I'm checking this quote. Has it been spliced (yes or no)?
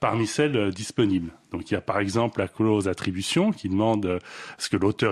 no